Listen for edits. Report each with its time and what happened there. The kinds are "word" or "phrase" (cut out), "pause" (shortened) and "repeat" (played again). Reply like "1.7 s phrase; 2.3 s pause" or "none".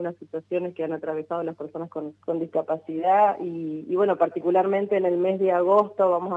2.2 s pause